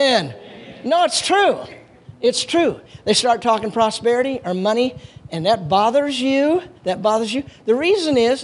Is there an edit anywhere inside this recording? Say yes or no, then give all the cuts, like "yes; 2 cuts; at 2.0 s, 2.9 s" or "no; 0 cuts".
yes; 1 cut; at 6.8 s